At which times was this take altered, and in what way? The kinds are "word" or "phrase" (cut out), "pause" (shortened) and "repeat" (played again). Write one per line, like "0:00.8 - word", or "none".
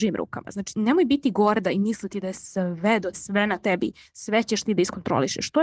0:03.1 - word